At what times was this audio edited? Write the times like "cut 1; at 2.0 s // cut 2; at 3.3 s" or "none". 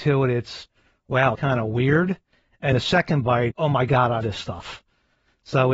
cut 1; at 1.3 s // cut 2; at 2.7 s // cut 3; at 3.5 s // cut 4; at 4.2 s